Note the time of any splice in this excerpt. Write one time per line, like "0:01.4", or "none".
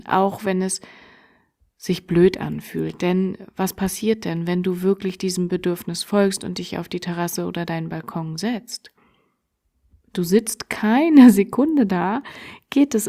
none